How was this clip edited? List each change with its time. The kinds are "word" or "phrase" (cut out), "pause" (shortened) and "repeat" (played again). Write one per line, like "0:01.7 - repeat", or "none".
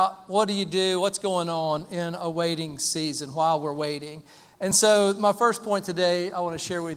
none